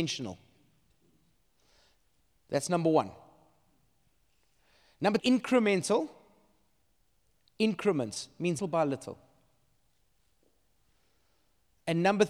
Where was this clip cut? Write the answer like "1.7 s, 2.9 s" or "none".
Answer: 5.2 s, 8.6 s